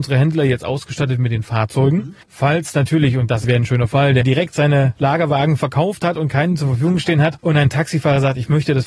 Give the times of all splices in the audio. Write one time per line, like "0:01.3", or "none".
0:02.2
0:03.4
0:04.2